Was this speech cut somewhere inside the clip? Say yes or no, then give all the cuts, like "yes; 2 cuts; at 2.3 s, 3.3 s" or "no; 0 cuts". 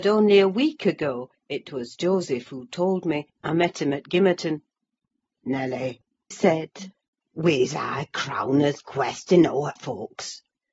yes; 3 cuts; at 3.4 s, 6.3 s, 9.8 s